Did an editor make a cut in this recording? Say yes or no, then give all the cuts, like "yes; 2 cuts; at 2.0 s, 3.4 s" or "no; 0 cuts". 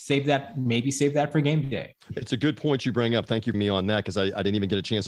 yes; 2 cuts; at 2.0 s, 3.5 s